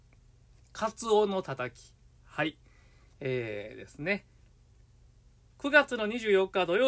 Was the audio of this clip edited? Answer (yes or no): no